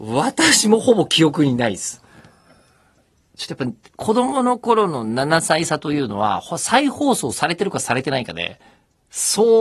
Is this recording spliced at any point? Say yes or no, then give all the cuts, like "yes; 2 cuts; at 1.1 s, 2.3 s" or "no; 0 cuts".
no; 0 cuts